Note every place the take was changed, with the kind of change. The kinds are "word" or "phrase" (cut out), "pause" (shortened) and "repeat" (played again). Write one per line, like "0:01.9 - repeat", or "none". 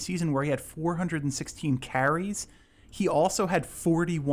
none